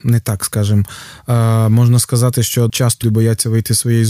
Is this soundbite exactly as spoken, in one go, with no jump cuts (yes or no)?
no